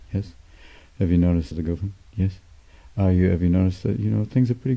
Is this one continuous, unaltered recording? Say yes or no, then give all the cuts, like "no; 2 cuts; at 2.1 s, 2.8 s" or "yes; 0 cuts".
no; 1 cut; at 1.5 s